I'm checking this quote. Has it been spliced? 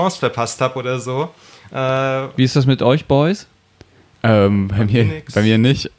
no; 0 cuts

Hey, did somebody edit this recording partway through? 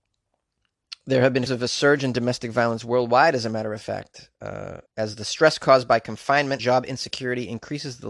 yes; 3 cuts; at 1.5 s, 4.9 s, 6.6 s

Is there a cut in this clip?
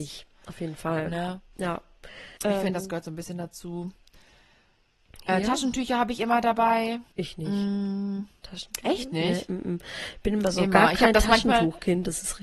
yes; 2 cuts; at 2.4 s, 7.1 s

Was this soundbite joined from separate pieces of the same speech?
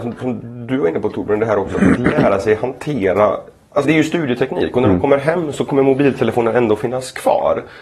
yes; 1 cut; at 3.8 s

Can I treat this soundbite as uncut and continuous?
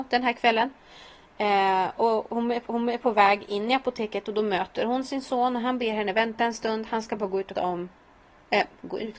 no; 2 cuts; at 2.7 s, 7.6 s

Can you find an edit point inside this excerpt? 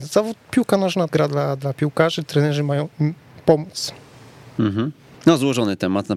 yes; 1 cut; at 1.1 s

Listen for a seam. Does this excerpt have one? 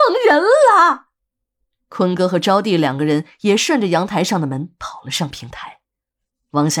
no; 0 cuts

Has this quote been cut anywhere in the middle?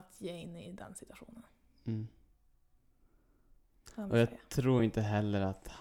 no; 0 cuts

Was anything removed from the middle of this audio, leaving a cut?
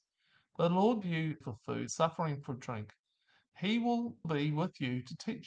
yes; 4 cuts; at 1.0 s, 1.4 s, 1.9 s, 4.2 s

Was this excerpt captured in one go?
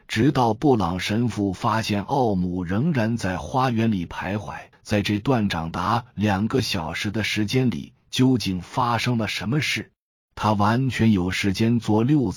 no; 2 cuts; at 4.7 s, 10.3 s

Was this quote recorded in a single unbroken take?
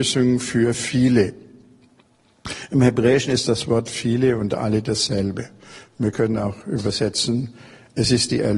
yes; 0 cuts

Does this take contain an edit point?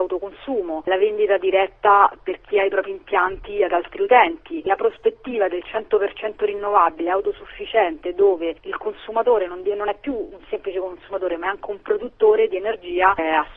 no; 0 cuts

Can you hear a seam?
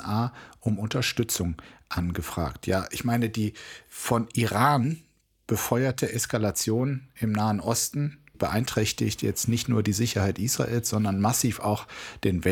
yes; 1 cut; at 8.3 s

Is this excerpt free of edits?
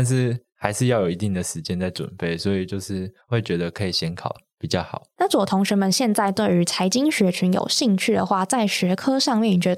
yes; 0 cuts

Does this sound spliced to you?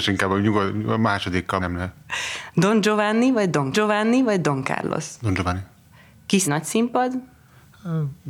yes; 3 cuts; at 1.6 s, 3.7 s, 6.4 s

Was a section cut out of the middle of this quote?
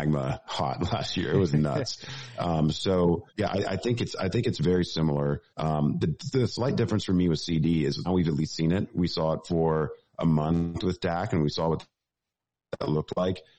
yes; 3 cuts; at 3.3 s, 5.5 s, 8.0 s

